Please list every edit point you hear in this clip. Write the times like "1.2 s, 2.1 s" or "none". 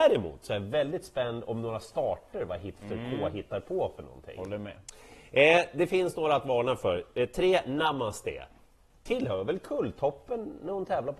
none

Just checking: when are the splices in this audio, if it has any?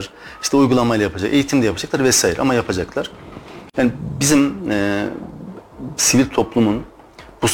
none

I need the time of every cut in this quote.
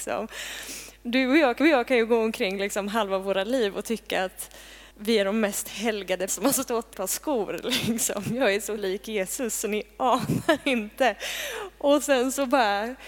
1.6 s, 4.9 s, 6.3 s, 6.9 s, 8.8 s

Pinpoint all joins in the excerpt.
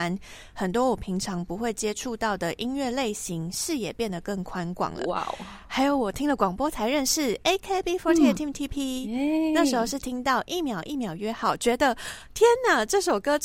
none

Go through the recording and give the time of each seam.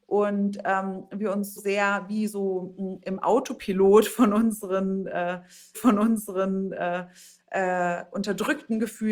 1.6 s, 5.7 s

